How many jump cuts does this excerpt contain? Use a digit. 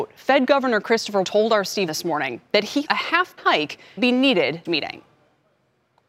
6